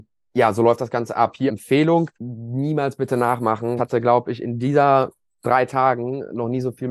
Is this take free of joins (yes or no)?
no